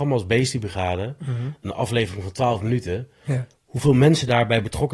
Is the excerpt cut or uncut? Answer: cut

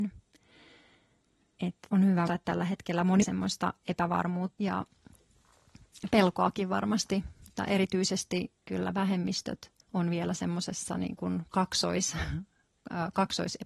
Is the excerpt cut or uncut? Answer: cut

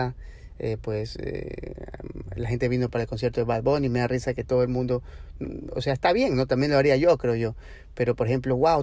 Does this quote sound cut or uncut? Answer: uncut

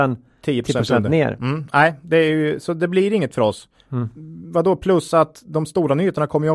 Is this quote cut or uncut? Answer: uncut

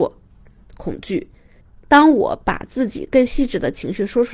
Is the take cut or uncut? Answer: uncut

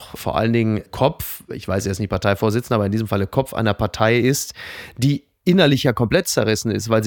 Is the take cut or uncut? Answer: uncut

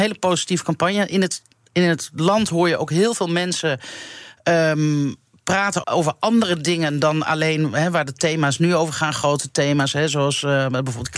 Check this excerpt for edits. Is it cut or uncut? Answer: cut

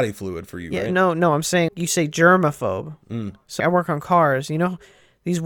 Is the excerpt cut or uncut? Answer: cut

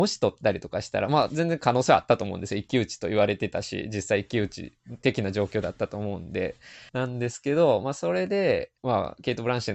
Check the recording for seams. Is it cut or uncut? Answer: cut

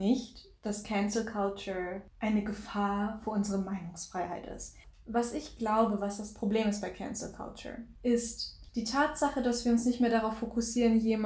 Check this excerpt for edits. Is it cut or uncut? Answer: cut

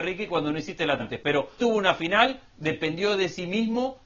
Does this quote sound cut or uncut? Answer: cut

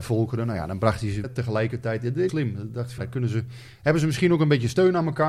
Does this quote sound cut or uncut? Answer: cut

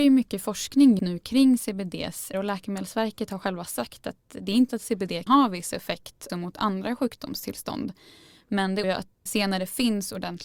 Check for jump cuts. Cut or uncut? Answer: cut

